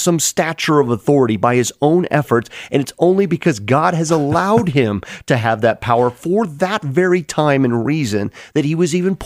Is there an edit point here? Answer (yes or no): no